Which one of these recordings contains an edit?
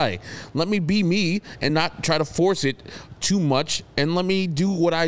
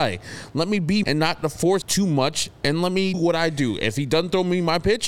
second; 4 cuts; at 1.0 s, 1.4 s, 1.8 s, 3.1 s

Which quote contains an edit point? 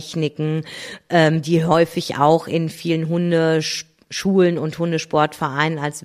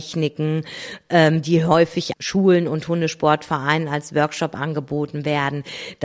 second; 1 cut; at 2.1 s

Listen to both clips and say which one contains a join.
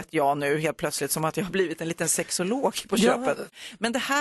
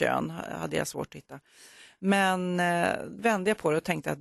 second; 1 cut; at 3.2 s

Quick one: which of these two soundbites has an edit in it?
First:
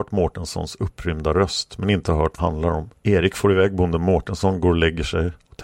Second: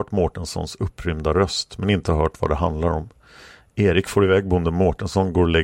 first; 2 cuts; at 2.4 s, 3.0 s

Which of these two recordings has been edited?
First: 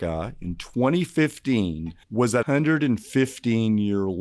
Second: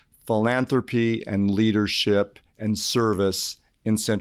first; 2 cuts; at 2.0 s, 2.4 s

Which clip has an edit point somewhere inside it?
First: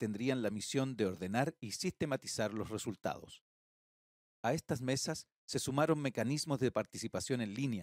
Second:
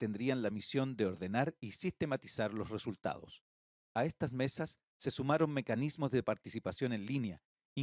second; 1 cut; at 3.7 s

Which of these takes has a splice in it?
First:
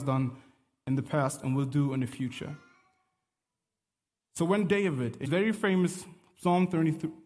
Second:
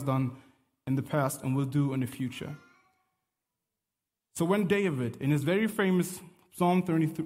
first; 1 cut; at 5.2 s

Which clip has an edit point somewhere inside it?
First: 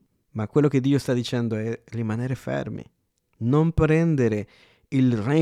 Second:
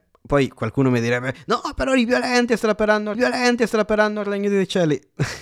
second; 1 cut; at 3.1 s

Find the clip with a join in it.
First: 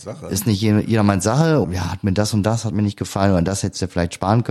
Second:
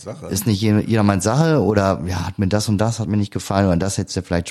first; 1 cut; at 1.6 s

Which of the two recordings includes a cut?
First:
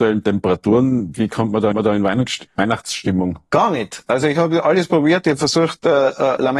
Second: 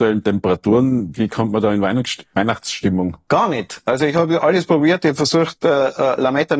first; 1 cut; at 1.7 s

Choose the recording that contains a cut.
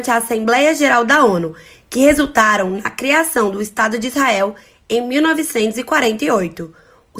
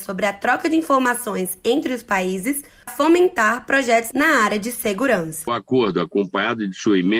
second; 1 cut; at 2.9 s

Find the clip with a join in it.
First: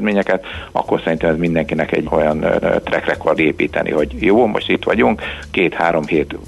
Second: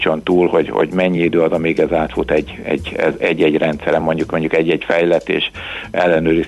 first; 3 cuts; at 2.0 s, 2.6 s, 3.4 s

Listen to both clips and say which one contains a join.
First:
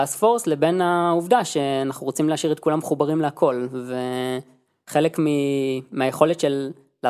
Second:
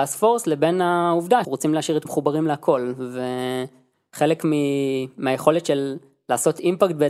second; 2 cuts; at 1.4 s, 2.1 s

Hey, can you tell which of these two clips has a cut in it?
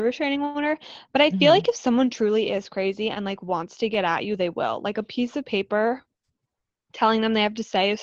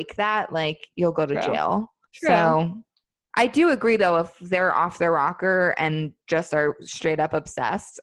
second; 1 cut; at 2.0 s

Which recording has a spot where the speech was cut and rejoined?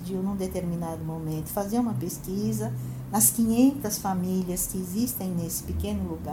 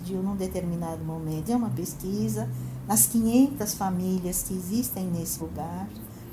second; 2 cuts; at 1.5 s, 5.4 s

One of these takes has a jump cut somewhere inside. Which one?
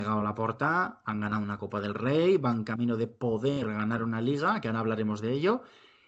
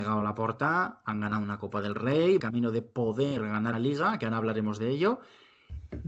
second; 2 cuts; at 2.4 s, 3.7 s

